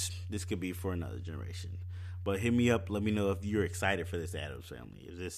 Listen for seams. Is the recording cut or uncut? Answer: uncut